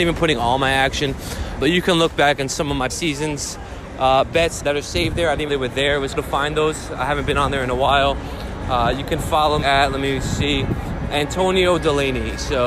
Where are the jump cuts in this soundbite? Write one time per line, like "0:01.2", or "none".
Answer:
0:01.6
0:02.9
0:04.6
0:05.5
0:06.2
0:09.6
0:11.1